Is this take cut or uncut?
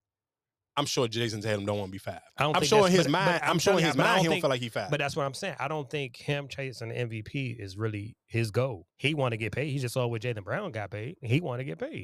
cut